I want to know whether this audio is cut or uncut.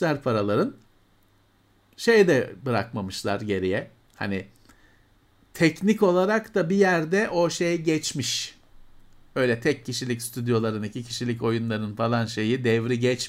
uncut